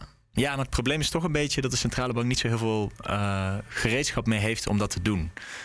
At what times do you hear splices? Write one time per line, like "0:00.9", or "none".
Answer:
none